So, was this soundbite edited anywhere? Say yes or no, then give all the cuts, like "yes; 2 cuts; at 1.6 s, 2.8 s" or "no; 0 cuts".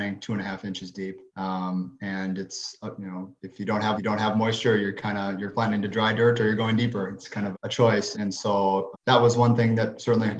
yes; 5 cuts; at 1.3 s, 4.0 s, 7.5 s, 8.1 s, 8.9 s